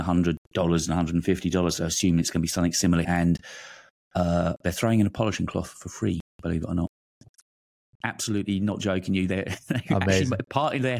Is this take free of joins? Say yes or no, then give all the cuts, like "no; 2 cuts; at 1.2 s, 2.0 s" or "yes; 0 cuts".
no; 1 cut; at 3.0 s